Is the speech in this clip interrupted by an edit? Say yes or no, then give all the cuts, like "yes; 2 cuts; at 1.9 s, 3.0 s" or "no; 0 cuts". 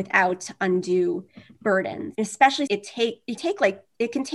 yes; 2 cuts; at 2.7 s, 3.4 s